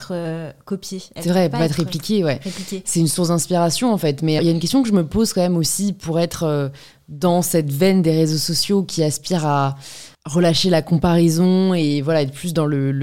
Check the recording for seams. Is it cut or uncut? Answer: cut